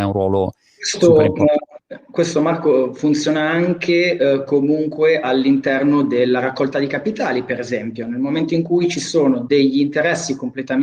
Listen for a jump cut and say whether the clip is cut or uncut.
uncut